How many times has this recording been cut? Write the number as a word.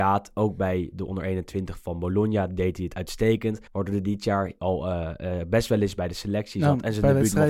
one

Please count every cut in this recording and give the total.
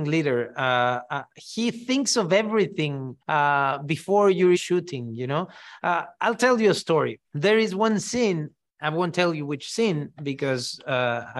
four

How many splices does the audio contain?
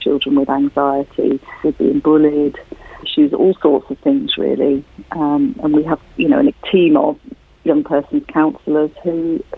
three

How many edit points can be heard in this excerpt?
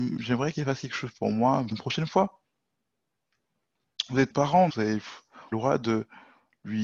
four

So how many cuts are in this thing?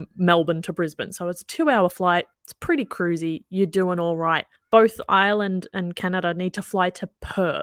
two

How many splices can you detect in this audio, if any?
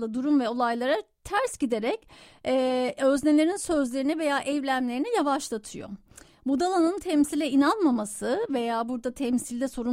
zero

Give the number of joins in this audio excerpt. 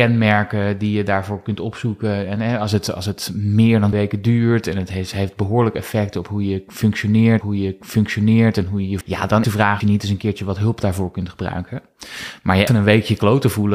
six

